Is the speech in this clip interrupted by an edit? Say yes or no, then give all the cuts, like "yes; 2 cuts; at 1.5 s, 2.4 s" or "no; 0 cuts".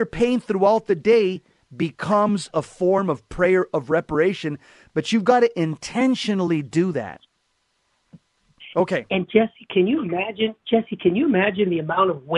no; 0 cuts